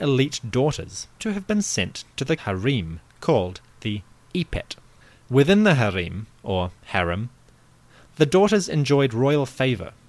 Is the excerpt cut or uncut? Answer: cut